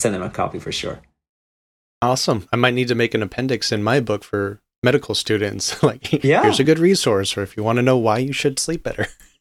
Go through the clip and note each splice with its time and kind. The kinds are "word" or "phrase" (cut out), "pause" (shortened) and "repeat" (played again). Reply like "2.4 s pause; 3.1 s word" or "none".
none